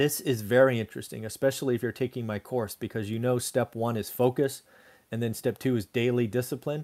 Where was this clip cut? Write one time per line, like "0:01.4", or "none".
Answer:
none